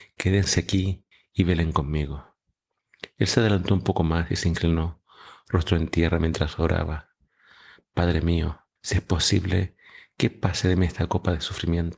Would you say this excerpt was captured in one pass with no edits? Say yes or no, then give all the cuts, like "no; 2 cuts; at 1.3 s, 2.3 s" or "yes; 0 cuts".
no; 2 cuts; at 1.1 s, 8.8 s